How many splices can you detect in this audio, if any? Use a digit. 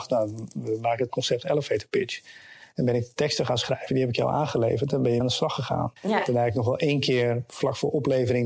3